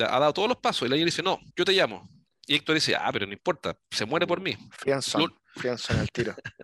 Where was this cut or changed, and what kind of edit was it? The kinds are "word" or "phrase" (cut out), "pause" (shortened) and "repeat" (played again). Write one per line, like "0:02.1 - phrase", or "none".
none